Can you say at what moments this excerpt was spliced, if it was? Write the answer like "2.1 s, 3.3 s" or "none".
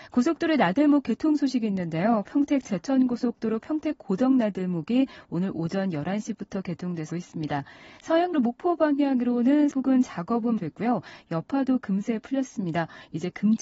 7.1 s, 8.3 s, 9.7 s, 10.6 s